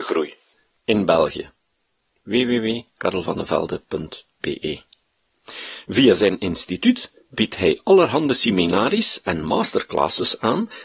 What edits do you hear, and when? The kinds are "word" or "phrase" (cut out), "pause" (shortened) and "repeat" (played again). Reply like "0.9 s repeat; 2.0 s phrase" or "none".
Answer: none